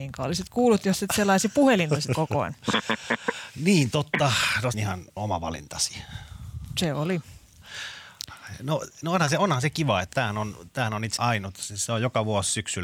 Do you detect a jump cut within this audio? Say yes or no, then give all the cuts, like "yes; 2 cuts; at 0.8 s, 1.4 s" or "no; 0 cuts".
yes; 5 cuts; at 2.1 s, 4.7 s, 5.2 s, 10.1 s, 11.2 s